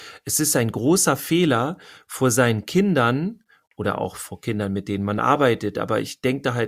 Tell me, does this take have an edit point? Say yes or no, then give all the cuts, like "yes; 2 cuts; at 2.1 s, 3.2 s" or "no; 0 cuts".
no; 0 cuts